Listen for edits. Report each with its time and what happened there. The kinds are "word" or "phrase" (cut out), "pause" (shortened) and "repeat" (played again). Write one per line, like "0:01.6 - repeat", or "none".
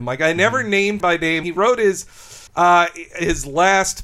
0:01.0 - word
0:01.4 - word
0:02.5 - pause